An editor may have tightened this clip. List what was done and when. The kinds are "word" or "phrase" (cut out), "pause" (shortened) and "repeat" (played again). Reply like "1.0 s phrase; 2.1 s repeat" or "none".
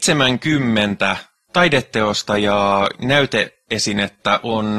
1.4 s pause; 2.9 s word